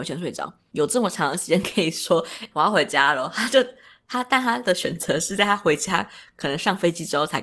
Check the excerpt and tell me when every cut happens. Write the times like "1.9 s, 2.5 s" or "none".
2.5 s